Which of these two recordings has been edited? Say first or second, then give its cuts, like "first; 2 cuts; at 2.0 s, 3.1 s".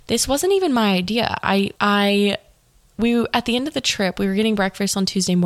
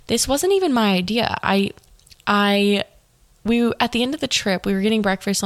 first; 1 cut; at 1.8 s